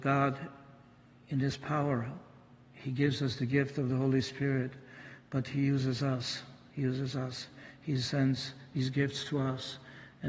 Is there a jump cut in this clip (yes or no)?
no